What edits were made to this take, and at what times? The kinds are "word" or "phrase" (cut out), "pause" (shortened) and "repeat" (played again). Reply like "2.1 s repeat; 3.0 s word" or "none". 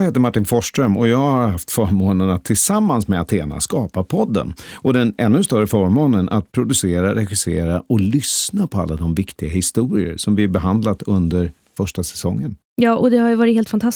12.6 s pause